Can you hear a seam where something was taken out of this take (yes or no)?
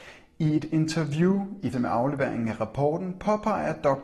yes